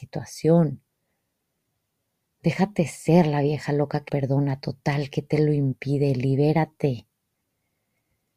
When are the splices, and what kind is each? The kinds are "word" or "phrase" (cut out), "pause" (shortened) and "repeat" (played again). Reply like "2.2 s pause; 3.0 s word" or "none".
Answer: 4.1 s word